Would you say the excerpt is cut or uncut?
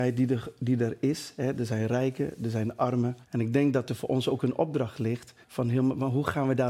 cut